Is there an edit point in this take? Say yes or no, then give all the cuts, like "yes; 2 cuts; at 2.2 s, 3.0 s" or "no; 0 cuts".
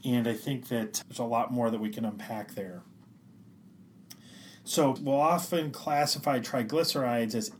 yes; 2 cuts; at 1.0 s, 5.0 s